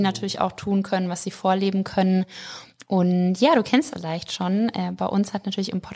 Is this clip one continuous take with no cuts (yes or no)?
no